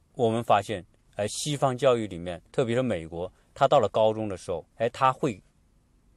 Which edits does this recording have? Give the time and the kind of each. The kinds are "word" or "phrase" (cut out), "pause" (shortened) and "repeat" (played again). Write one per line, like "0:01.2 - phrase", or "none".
0:02.5 - pause
0:04.7 - pause